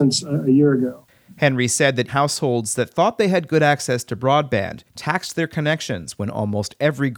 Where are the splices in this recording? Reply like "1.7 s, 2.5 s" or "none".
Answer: 2.1 s, 4.9 s